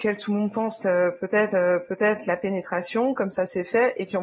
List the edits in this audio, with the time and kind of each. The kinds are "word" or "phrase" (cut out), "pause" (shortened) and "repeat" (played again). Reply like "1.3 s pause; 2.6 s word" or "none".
1.5 s repeat